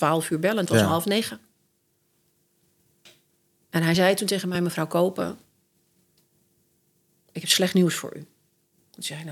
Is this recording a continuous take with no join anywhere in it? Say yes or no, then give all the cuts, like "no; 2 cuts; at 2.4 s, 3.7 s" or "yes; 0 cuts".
yes; 0 cuts